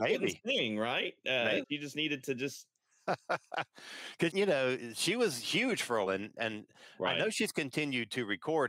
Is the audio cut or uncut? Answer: cut